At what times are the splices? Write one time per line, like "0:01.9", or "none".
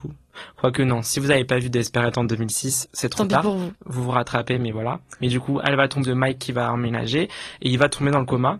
0:02.8
0:03.8
0:06.0